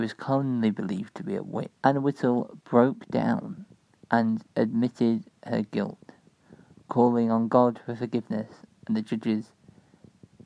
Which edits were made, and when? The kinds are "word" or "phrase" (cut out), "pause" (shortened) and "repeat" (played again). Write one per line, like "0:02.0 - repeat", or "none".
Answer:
0:01.8 - pause
0:04.5 - pause

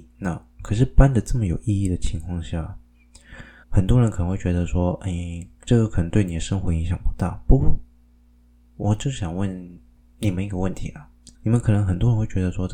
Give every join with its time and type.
0:03.6 - pause
0:11.3 - pause

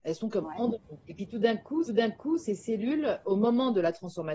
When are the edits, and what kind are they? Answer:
0:01.0 - pause
0:01.9 - repeat
0:03.2 - word

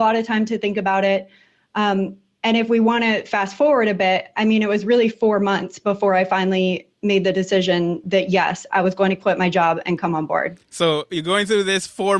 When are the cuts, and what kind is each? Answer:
none

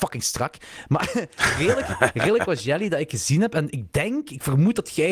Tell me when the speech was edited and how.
none

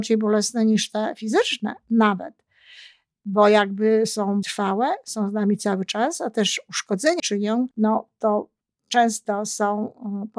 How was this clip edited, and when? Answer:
0:04.4 - word
0:07.2 - word
0:07.7 - pause

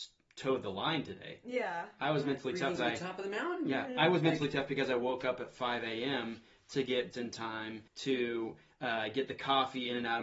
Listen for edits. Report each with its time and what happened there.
0:02.8 - word
0:07.1 - word
0:07.9 - pause

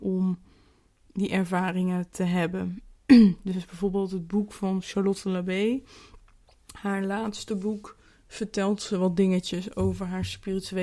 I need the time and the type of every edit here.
none

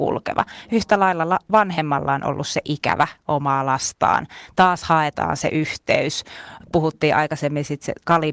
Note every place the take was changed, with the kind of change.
none

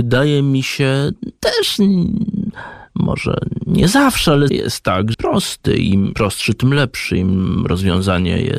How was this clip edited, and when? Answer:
0:04.5 - word
0:05.1 - phrase
0:06.1 - word

